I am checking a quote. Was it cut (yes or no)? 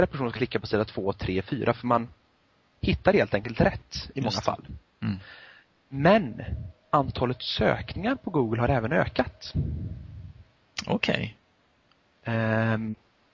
no